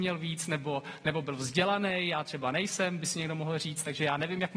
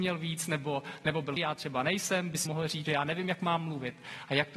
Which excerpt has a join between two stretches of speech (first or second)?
second